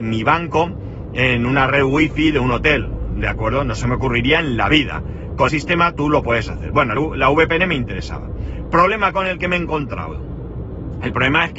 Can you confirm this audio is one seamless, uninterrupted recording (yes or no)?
no